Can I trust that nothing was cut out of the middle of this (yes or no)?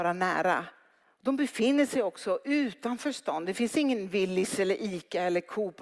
no